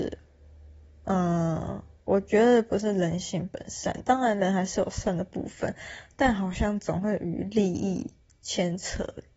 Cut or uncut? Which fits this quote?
uncut